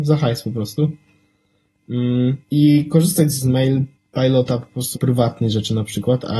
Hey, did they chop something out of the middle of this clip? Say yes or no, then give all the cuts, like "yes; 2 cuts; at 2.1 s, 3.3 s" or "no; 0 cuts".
yes; 4 cuts; at 2.4 s, 3.4 s, 3.9 s, 4.9 s